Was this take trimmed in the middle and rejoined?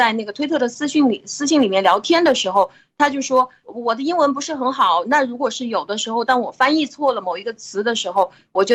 yes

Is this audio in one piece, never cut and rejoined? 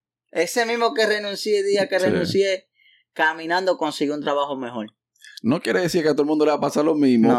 yes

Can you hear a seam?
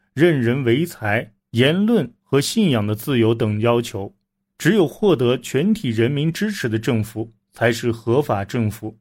yes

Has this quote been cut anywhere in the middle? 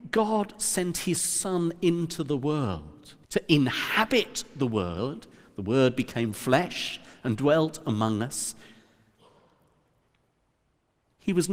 yes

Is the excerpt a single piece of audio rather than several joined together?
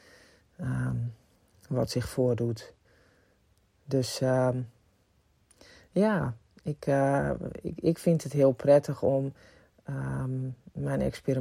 yes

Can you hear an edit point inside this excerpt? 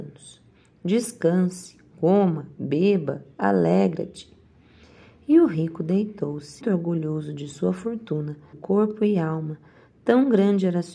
yes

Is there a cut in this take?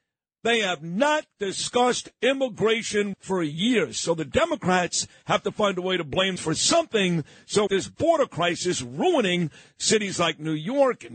yes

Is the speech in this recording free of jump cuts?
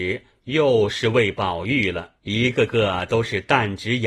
no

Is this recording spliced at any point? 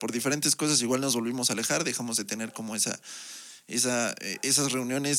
no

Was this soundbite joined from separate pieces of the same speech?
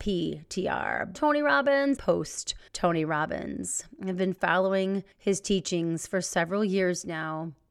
yes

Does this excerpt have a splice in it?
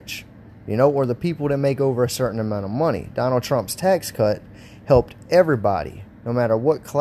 no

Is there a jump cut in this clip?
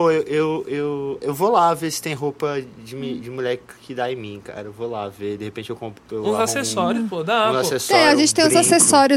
yes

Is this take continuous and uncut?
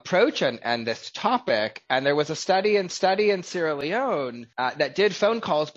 no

